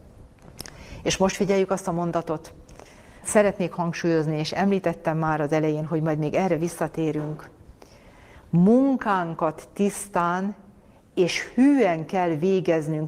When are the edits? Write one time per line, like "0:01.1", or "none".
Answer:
0:03.2